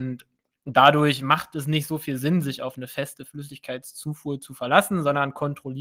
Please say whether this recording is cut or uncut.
uncut